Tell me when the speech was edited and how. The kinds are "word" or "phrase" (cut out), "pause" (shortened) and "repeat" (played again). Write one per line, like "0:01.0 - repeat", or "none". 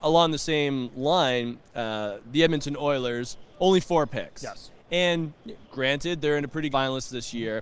0:03.5 - pause
0:05.6 - pause
0:06.7 - phrase